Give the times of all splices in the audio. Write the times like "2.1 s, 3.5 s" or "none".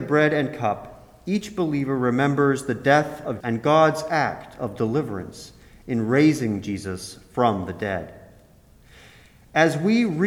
3.4 s